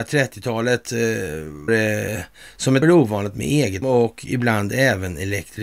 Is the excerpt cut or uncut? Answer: cut